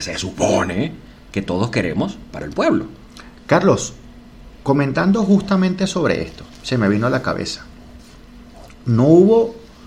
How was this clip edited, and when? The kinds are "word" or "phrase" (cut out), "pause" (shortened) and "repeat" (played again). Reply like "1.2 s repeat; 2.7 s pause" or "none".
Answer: 2.3 s phrase